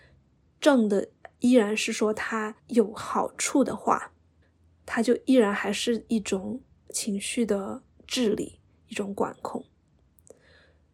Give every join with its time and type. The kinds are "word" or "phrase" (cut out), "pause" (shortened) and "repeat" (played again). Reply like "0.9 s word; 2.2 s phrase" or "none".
2.6 s pause; 4.4 s pause; 6.7 s pause